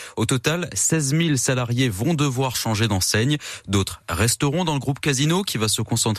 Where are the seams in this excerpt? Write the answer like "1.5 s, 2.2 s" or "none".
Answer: none